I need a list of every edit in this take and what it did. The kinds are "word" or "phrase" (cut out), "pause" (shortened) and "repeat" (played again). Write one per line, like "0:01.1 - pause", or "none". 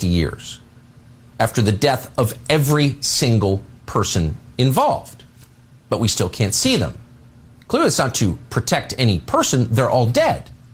none